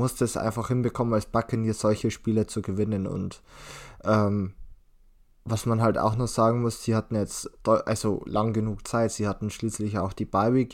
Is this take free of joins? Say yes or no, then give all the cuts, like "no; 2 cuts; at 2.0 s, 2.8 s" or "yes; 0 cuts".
yes; 0 cuts